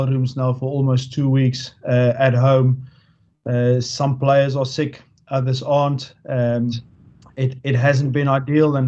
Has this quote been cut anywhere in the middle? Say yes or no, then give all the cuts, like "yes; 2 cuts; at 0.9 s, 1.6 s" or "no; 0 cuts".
no; 0 cuts